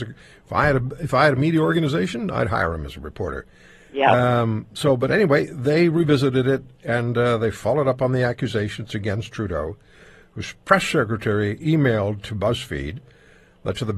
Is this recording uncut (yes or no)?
yes